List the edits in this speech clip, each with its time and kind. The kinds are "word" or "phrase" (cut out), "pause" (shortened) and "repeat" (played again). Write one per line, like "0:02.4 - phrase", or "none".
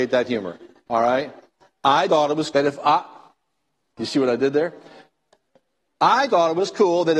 0:02.1 - word
0:02.5 - word
0:06.3 - word